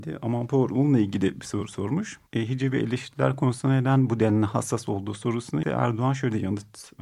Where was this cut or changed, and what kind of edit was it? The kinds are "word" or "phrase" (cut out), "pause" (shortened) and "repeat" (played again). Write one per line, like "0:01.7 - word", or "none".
0:02.3 - pause
0:05.6 - word